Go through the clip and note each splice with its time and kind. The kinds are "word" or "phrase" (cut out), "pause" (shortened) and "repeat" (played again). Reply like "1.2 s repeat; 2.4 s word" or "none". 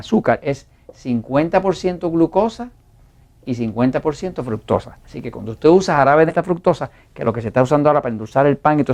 6.3 s phrase